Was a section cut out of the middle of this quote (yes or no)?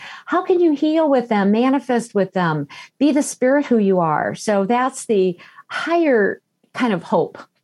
no